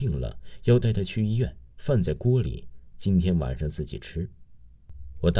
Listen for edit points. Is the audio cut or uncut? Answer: cut